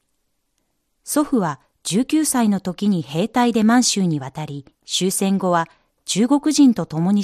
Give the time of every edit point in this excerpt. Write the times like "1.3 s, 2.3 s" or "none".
4.7 s